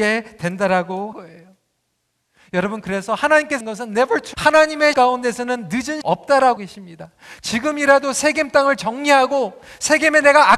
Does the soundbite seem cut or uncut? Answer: cut